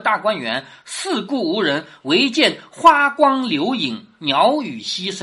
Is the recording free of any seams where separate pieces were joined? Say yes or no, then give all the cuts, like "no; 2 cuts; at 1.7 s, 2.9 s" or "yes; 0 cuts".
yes; 0 cuts